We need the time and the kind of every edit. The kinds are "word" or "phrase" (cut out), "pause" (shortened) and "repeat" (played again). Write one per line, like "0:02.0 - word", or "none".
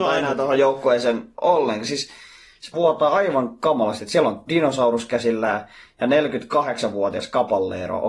0:02.7 - word
0:04.5 - word